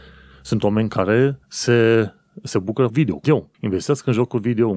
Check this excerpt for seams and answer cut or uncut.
cut